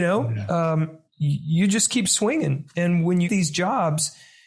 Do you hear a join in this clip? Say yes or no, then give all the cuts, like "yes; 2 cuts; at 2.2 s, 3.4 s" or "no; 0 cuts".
yes; 2 cuts; at 1.1 s, 3.2 s